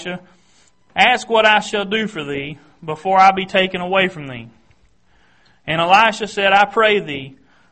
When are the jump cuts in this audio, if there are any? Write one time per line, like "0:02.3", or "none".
none